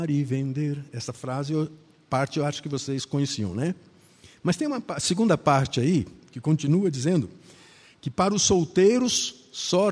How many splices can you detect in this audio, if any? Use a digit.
0